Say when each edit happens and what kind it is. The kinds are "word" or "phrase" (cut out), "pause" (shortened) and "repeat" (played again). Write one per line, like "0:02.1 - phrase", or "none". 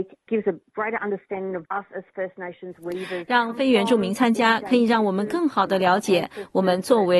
0:01.6 - word